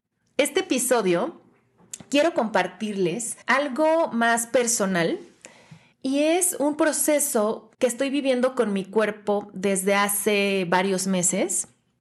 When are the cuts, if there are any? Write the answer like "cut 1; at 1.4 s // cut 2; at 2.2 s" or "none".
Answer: cut 1; at 3.4 s // cut 2; at 5.9 s // cut 3; at 7.7 s